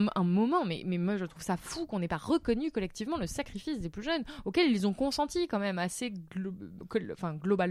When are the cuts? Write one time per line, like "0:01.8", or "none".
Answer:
none